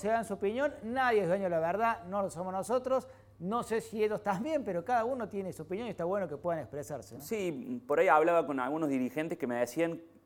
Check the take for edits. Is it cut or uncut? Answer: uncut